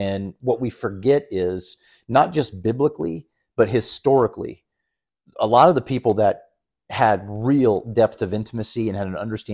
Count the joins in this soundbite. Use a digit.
0